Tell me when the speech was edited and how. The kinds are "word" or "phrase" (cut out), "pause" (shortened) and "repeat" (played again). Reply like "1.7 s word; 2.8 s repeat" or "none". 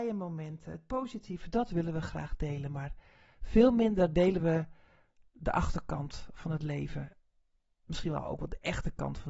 none